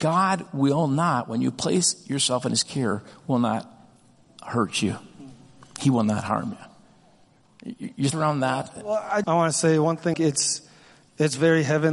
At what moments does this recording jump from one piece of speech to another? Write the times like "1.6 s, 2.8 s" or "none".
8.1 s, 9.2 s, 10.1 s